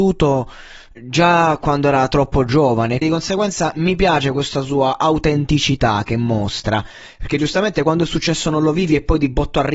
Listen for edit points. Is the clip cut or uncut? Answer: cut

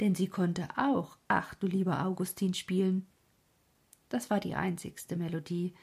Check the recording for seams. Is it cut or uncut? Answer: uncut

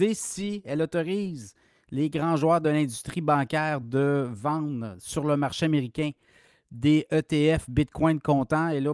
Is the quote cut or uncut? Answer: uncut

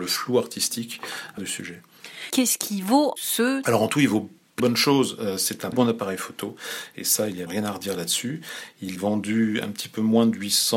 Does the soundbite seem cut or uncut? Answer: cut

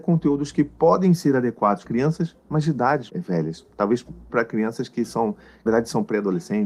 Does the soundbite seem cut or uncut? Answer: cut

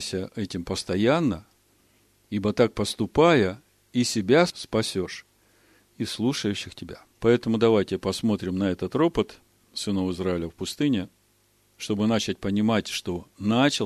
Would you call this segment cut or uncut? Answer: cut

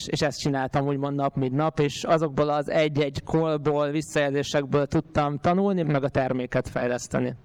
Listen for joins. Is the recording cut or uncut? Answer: cut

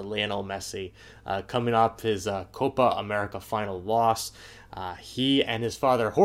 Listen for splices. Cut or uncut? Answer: uncut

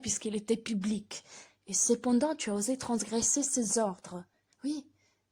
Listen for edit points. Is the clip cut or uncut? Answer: uncut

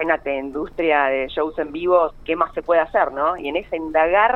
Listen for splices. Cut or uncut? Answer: uncut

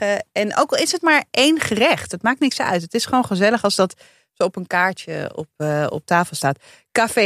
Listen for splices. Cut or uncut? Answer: uncut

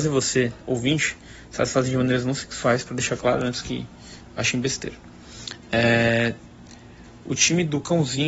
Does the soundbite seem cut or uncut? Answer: uncut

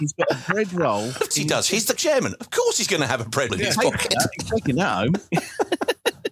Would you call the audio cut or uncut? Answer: cut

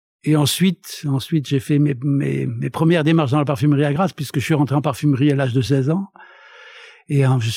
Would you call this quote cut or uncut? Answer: cut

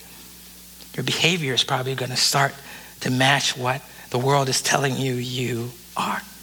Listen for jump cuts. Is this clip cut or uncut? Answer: uncut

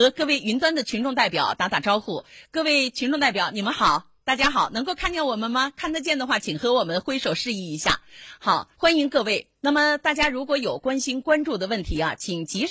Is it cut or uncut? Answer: cut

